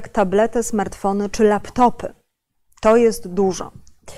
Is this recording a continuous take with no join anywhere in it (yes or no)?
no